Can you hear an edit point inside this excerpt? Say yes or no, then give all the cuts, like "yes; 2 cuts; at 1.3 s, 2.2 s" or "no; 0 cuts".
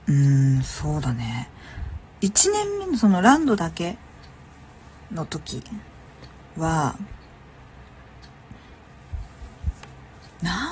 no; 0 cuts